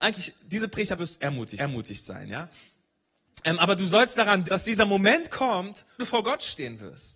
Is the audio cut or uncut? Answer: cut